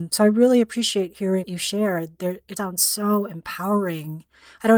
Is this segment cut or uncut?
cut